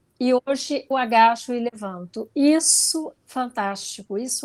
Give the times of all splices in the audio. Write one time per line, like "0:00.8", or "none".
0:00.9
0:03.2